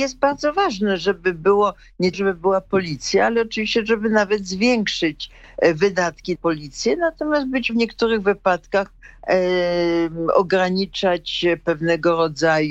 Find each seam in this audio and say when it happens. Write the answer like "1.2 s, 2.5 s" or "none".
2.1 s, 6.4 s, 7.7 s